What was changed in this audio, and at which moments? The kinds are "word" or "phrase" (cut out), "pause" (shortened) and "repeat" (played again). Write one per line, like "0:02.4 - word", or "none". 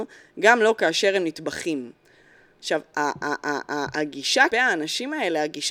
0:04.5 - word